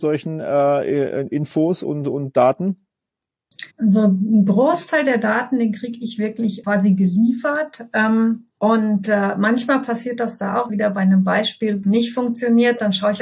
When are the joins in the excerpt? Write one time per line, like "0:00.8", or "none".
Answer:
0:03.7
0:06.6
0:08.5
0:10.7
0:11.8